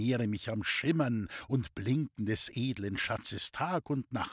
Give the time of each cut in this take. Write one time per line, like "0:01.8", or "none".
none